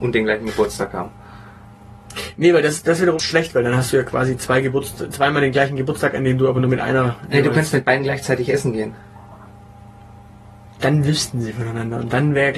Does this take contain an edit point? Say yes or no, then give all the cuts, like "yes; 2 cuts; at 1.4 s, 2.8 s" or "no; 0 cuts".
yes; 2 cuts; at 2.8 s, 3.2 s